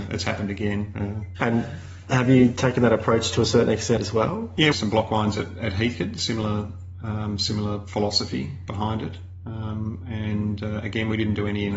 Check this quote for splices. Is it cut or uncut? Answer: cut